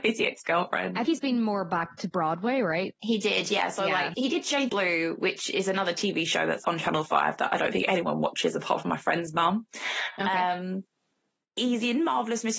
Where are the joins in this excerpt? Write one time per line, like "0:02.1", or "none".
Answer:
0:01.0
0:04.1
0:04.7
0:06.6